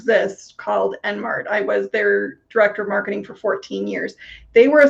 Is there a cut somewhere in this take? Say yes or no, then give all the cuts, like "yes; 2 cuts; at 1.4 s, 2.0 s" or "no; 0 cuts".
no; 0 cuts